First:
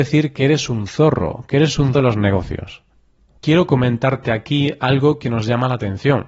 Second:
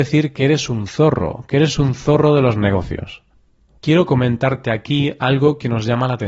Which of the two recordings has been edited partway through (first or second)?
first